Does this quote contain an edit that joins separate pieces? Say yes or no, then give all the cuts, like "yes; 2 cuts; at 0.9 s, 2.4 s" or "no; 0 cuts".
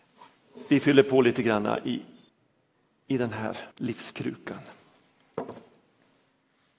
yes; 2 cuts; at 2.3 s, 3.7 s